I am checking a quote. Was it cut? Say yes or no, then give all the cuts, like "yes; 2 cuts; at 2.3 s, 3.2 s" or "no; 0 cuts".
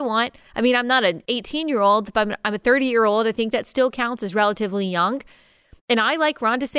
no; 0 cuts